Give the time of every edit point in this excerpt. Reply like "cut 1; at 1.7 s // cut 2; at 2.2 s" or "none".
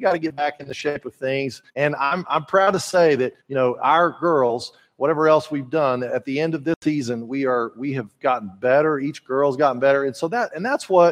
cut 1; at 1.7 s // cut 2; at 3.4 s